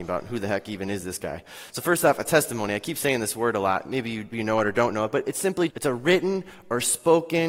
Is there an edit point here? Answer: yes; 2 cuts; at 4.3 s, 5.7 s

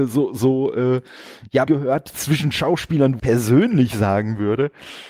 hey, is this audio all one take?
no; 2 cuts; at 1.7 s, 3.2 s

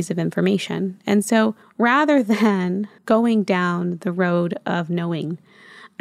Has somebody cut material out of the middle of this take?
yes; 2 cuts; at 1.6 s, 3.0 s

